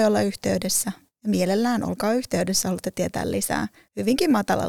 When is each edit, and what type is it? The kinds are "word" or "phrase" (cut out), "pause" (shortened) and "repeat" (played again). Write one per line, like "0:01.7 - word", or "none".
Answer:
none